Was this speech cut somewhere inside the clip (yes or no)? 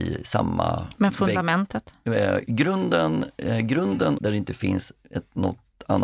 yes